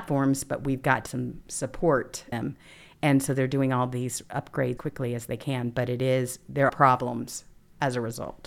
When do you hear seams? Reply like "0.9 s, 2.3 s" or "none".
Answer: 1.1 s, 2.3 s, 4.8 s, 6.7 s